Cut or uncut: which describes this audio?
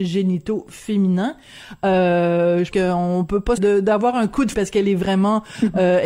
cut